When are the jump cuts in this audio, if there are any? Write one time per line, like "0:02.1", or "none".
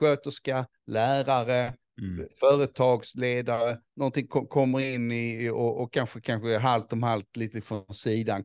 none